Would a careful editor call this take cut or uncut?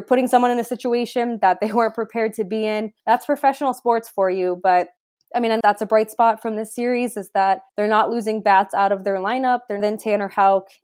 cut